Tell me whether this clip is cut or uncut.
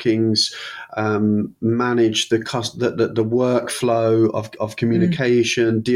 uncut